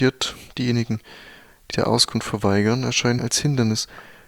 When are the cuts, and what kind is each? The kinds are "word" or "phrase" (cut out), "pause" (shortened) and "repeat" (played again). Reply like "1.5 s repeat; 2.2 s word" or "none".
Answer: 1.7 s word; 3.2 s word